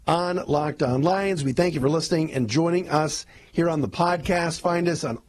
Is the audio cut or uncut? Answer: uncut